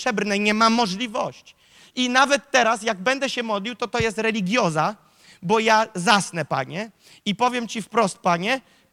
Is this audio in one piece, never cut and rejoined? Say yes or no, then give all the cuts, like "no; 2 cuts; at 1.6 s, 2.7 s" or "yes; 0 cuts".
yes; 0 cuts